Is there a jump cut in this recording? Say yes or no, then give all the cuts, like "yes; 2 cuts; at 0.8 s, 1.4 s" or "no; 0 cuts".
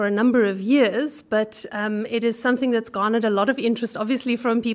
no; 0 cuts